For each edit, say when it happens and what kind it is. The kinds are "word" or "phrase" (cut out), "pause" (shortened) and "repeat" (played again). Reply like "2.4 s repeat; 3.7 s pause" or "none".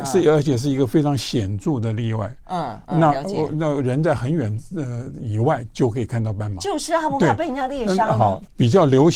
none